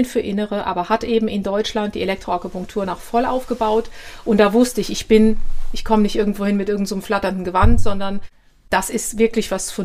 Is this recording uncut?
yes; 0 cuts

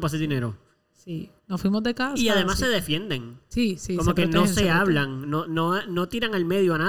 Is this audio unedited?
no; 1 cut; at 1.4 s

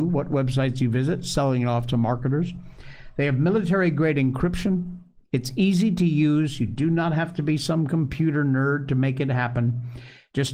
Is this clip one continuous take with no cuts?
yes; 0 cuts

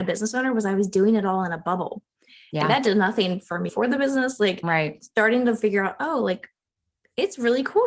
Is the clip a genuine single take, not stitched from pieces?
no; 1 cut; at 3.7 s

